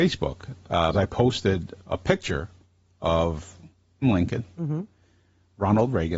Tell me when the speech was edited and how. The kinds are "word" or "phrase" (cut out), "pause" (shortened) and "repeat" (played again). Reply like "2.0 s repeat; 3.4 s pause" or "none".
0.9 s word; 1.8 s word; 4.0 s word